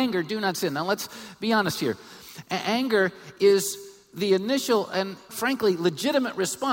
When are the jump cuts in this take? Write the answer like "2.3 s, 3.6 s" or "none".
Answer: 5.3 s